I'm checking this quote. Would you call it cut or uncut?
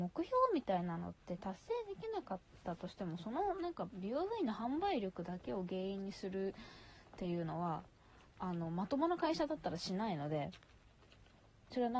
uncut